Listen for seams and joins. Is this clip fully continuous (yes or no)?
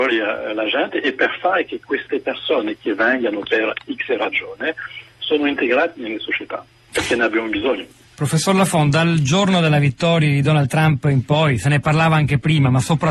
yes